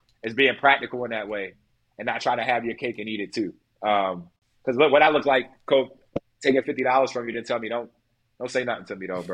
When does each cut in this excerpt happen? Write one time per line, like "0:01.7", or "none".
none